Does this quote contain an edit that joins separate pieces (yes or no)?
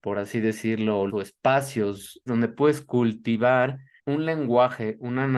yes